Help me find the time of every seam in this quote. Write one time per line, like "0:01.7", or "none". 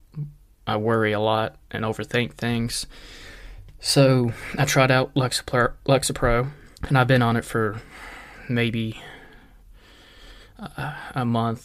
0:06.8